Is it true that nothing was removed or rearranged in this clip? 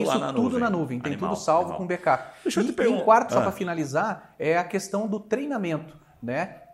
no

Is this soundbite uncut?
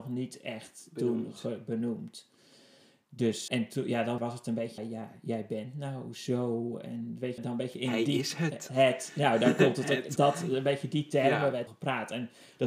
no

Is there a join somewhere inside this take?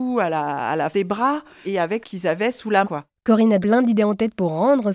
yes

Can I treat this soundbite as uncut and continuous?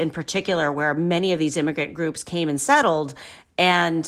yes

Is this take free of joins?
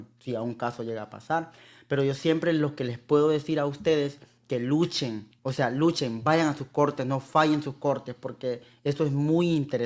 no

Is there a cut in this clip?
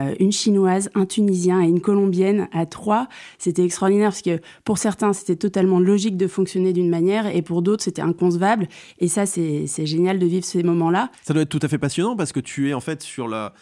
no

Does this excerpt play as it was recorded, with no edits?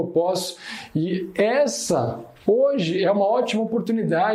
yes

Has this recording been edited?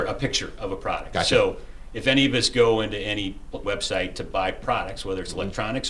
yes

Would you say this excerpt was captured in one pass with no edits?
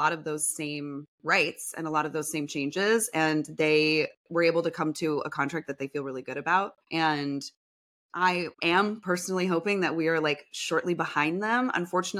no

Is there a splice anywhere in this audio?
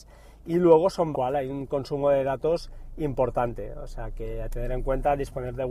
yes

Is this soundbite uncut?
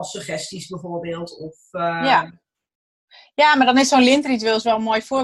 yes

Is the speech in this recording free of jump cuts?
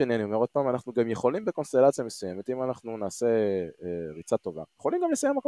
yes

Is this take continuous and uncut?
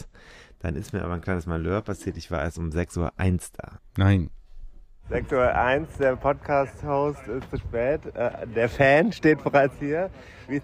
yes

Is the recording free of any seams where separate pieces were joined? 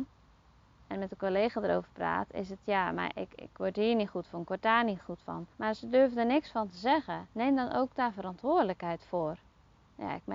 no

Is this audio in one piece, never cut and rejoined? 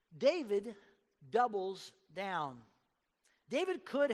yes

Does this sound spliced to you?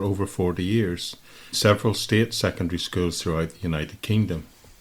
yes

